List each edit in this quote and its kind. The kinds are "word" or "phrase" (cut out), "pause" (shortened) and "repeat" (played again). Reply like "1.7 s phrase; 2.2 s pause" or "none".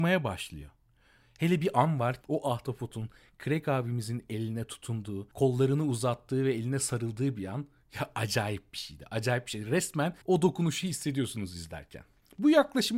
2.2 s phrase; 10.2 s pause